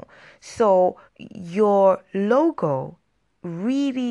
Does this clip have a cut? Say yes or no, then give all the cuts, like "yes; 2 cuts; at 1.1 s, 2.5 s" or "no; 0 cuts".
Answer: yes; 1 cut; at 1.1 s